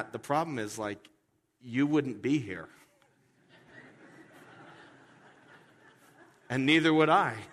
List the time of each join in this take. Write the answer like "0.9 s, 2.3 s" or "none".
none